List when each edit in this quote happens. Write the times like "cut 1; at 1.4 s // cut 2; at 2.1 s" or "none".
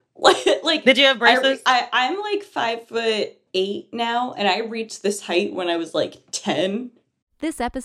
cut 1; at 3.5 s